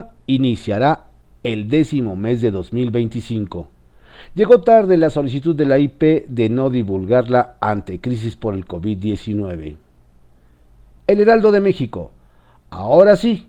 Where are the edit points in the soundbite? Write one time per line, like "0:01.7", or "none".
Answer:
none